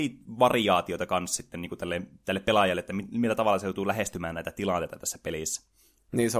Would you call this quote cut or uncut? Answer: uncut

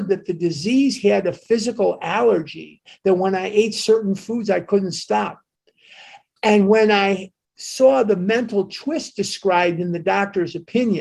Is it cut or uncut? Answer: uncut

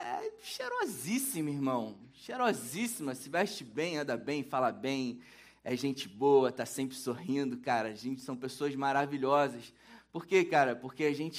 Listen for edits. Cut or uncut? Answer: uncut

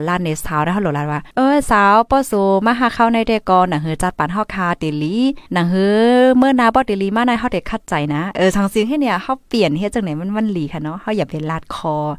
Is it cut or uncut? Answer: cut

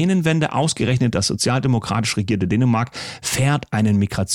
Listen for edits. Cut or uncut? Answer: uncut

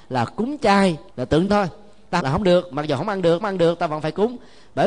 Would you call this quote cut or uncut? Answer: cut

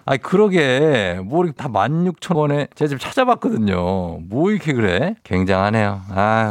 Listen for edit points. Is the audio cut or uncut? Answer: cut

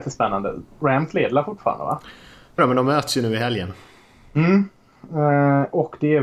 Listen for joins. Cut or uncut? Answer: cut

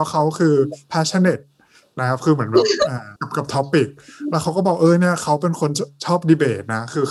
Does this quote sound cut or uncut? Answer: cut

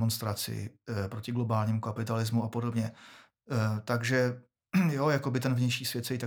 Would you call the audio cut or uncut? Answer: uncut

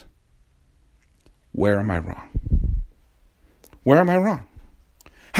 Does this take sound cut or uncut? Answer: uncut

